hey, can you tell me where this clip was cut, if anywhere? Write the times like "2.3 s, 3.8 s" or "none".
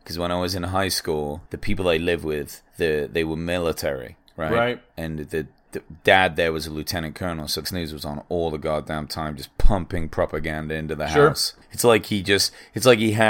1.5 s, 2.7 s, 7.6 s, 11.6 s